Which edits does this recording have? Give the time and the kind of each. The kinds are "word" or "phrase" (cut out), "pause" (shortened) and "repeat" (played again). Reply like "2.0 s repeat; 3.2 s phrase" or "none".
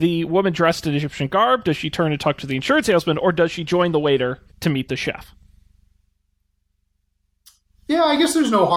4.5 s pause